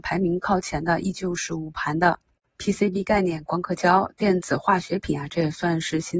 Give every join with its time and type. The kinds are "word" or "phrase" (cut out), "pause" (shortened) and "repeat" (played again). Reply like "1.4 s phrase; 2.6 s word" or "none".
none